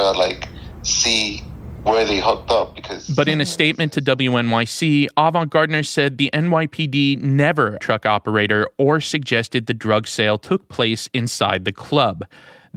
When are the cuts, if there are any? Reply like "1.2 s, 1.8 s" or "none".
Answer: 7.8 s